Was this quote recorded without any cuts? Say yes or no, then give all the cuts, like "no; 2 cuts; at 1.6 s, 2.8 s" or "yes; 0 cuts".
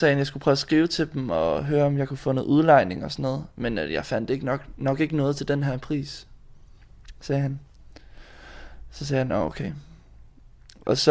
yes; 0 cuts